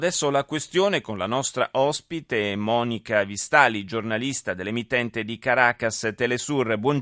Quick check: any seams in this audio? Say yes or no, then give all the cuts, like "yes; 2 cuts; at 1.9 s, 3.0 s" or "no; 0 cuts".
no; 0 cuts